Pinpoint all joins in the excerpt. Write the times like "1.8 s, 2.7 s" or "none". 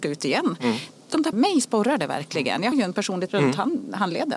1.3 s, 2.7 s, 3.3 s